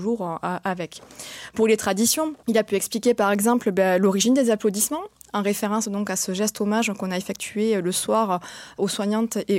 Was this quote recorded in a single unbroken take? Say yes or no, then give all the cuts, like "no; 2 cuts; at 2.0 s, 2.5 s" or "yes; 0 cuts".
yes; 0 cuts